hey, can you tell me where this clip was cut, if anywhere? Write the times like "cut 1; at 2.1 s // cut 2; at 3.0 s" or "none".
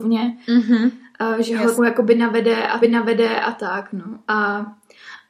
cut 1; at 1.8 s // cut 2; at 2.8 s